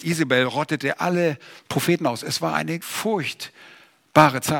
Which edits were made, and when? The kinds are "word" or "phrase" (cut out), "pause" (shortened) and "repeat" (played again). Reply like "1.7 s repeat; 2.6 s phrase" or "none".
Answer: 1.6 s pause; 2.8 s word